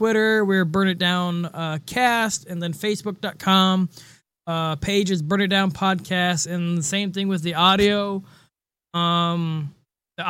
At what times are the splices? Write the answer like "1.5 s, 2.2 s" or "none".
none